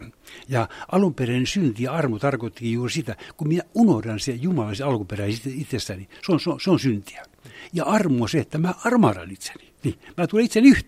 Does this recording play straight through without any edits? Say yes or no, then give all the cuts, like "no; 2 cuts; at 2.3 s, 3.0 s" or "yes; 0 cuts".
yes; 0 cuts